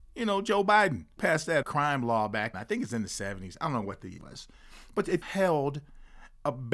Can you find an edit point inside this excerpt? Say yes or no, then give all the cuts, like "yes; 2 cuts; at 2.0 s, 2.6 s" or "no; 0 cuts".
yes; 5 cuts; at 1.2 s, 1.6 s, 2.5 s, 4.2 s, 5.2 s